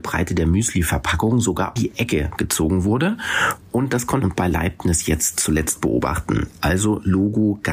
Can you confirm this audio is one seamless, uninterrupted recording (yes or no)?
no